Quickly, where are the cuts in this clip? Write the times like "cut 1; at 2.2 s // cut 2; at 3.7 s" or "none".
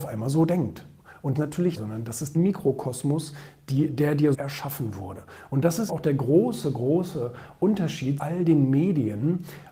cut 1; at 1.3 s // cut 2; at 1.8 s // cut 3; at 2.3 s // cut 4; at 4.3 s // cut 5; at 5.9 s // cut 6; at 8.2 s